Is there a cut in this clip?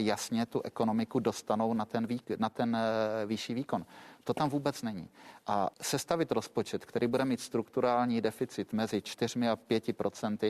yes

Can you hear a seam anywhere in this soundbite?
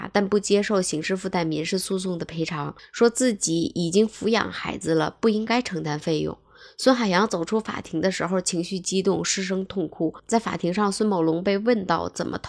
yes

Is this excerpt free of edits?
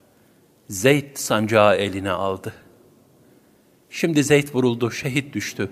yes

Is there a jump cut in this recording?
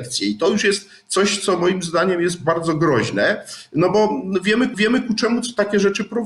yes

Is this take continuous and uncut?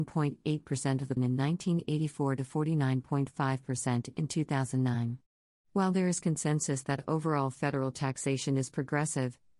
no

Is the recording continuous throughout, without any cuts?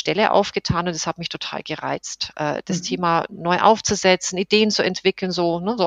yes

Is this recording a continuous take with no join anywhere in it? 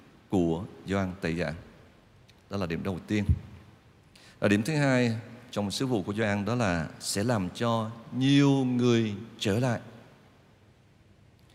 yes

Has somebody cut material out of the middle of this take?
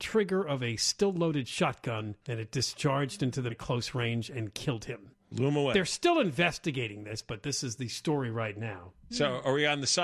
yes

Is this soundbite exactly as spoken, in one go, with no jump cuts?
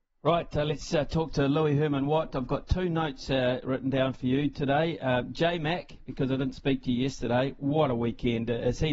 yes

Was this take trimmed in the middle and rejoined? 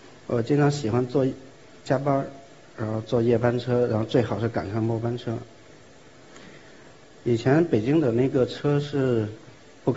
no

